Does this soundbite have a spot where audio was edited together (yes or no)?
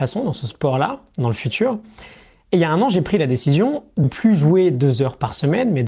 yes